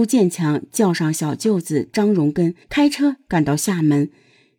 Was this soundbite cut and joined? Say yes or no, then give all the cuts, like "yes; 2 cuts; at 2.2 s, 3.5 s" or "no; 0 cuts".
yes; 1 cut; at 2.6 s